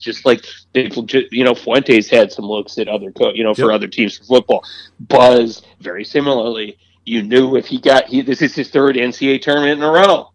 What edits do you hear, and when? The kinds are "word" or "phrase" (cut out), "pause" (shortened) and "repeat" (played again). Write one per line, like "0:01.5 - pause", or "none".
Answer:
none